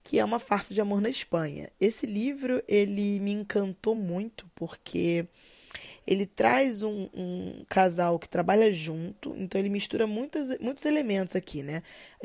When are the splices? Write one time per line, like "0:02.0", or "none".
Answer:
none